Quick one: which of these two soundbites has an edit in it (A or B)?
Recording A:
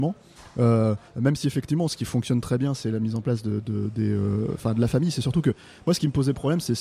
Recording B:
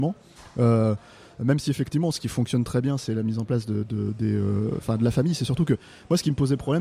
A